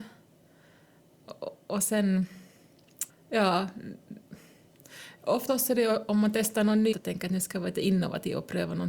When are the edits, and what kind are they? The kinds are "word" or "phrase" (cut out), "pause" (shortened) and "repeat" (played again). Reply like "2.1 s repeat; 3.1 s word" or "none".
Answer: 3.1 s pause; 5.5 s word; 6.9 s word

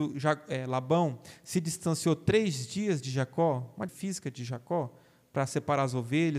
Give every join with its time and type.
3.9 s word

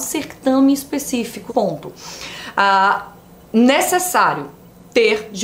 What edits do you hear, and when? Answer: 1.5 s word

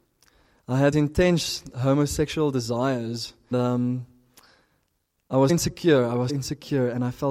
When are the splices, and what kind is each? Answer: 0.9 s word; 3.5 s word; 5.5 s word; 6.3 s word

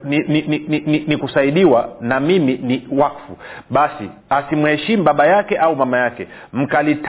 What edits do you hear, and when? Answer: 1.2 s word; 4.2 s pause

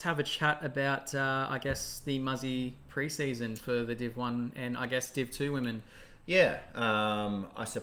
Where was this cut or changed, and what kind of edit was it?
none

